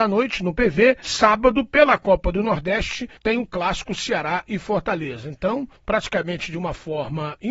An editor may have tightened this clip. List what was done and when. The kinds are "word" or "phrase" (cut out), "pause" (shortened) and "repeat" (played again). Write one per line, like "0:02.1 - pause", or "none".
0:01.0 - word
0:03.2 - pause
0:05.8 - pause